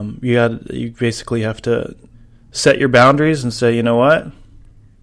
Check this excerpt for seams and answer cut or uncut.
cut